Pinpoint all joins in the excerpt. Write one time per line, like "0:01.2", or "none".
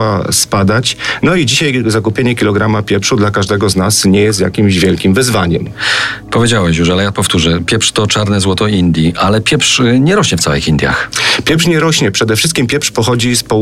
none